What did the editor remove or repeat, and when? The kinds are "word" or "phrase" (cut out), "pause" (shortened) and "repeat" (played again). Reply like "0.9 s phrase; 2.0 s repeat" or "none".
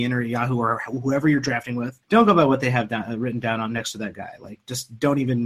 2.0 s pause